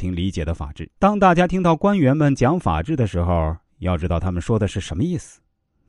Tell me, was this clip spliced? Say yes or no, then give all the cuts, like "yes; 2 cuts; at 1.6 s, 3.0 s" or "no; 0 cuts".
yes; 1 cut; at 1.0 s